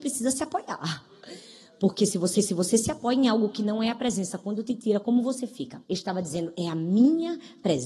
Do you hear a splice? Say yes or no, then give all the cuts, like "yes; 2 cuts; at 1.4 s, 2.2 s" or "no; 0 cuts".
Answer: yes; 2 cuts; at 2.3 s, 5.8 s